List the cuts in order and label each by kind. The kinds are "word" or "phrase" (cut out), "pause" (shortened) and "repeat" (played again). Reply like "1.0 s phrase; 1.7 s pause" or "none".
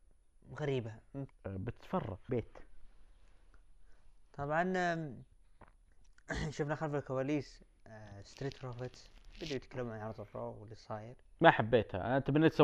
1.3 s word; 2.3 s word; 9.3 s pause